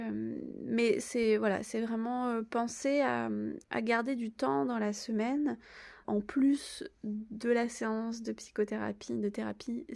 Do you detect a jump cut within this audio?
yes; 2 cuts; at 3.6 s, 6.0 s

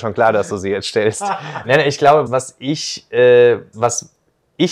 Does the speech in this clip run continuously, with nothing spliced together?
no; 3 cuts; at 1.6 s, 2.3 s, 3.7 s

